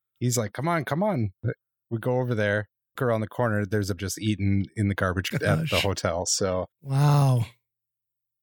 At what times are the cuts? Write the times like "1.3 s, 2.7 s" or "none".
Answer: 1.3 s, 3.0 s, 4.0 s, 5.3 s, 6.7 s

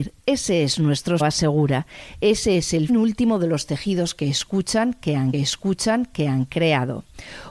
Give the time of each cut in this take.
1.2 s, 2.9 s, 5.3 s

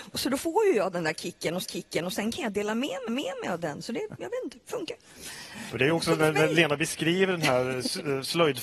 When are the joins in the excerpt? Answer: 1.6 s, 3.1 s

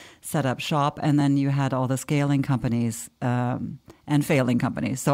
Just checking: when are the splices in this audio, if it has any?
none

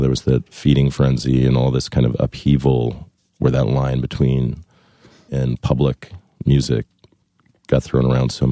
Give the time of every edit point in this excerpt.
5.3 s

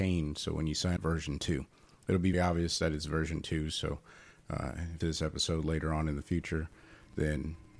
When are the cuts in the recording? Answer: 1.0 s, 2.3 s, 5.0 s

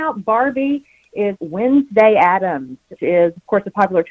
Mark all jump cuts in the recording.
1.4 s, 3.0 s

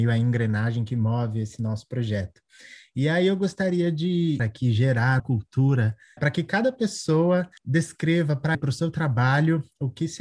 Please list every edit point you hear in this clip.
4.4 s, 5.2 s, 6.2 s, 7.6 s, 8.5 s

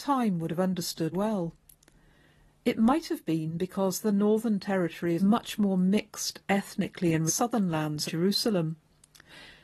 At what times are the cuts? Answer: 1.1 s, 5.2 s, 7.3 s, 8.1 s

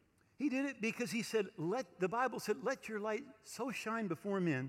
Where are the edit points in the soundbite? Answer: none

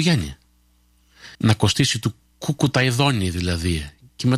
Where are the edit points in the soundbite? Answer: 1.3 s

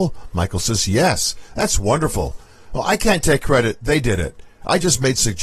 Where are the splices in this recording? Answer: none

